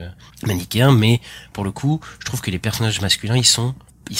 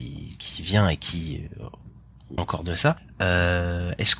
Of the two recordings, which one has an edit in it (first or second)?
second